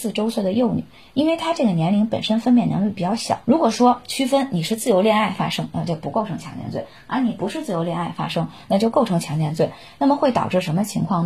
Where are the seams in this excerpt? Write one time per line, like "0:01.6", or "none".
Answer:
0:03.4